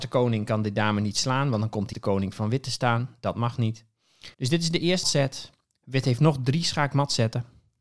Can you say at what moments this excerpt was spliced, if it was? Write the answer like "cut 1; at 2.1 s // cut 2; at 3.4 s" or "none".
cut 1; at 1.9 s // cut 2; at 4.3 s // cut 3; at 5.0 s